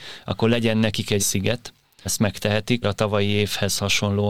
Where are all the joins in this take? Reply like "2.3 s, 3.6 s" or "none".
1.2 s, 2.0 s, 2.8 s